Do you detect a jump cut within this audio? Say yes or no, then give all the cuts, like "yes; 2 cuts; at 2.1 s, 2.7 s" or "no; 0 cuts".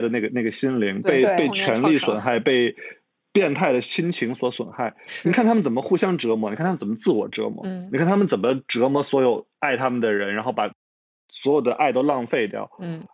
no; 0 cuts